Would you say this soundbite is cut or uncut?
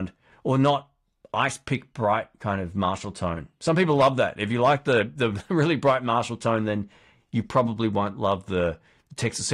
uncut